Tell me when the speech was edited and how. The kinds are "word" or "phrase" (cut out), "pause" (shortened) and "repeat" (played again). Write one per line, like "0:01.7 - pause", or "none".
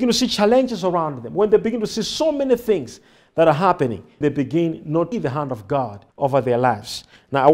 0:04.2 - word
0:05.1 - phrase
0:06.1 - pause